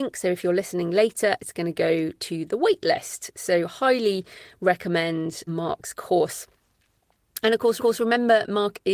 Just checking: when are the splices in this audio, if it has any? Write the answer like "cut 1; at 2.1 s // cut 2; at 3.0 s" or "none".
cut 1; at 5.5 s // cut 2; at 7.8 s